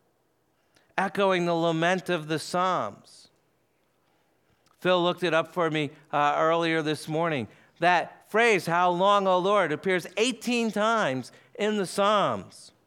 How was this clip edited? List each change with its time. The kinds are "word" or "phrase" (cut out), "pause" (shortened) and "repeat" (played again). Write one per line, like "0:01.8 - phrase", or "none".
none